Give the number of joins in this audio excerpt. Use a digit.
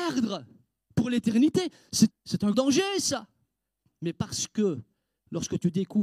2